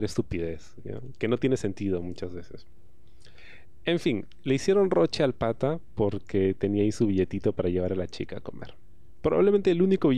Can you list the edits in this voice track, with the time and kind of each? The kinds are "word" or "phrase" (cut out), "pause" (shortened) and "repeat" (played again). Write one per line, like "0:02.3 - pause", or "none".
none